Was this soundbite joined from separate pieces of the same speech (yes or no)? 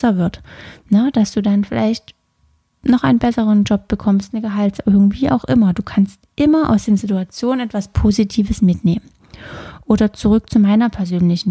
no